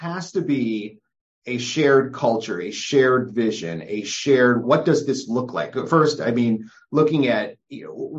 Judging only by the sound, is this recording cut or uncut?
cut